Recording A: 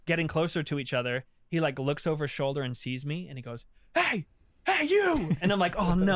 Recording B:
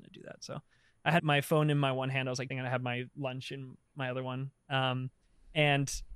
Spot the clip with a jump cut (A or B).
B